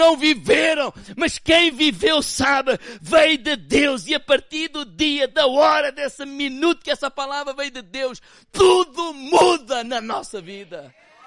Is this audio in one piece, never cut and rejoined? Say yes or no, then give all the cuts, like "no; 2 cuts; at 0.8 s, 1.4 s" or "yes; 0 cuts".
yes; 0 cuts